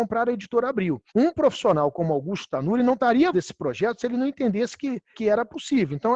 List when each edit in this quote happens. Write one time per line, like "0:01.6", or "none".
0:01.1
0:03.3
0:05.1